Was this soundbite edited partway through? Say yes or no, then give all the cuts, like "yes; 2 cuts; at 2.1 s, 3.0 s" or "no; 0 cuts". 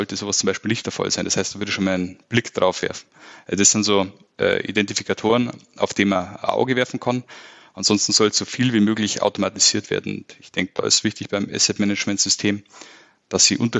no; 0 cuts